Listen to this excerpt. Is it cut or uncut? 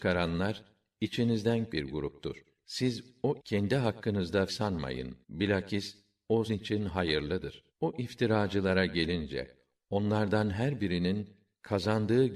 cut